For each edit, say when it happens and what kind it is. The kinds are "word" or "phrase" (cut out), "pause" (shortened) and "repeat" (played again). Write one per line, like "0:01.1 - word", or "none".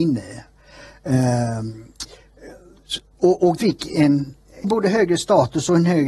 0:03.6 - word
0:04.6 - word